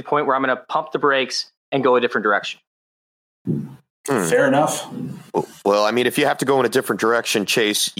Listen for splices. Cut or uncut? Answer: uncut